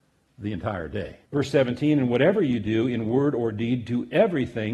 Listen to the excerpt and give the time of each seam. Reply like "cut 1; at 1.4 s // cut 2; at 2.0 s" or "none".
cut 1; at 1.3 s